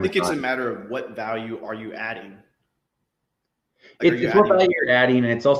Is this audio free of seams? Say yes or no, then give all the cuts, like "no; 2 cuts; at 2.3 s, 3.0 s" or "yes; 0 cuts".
yes; 0 cuts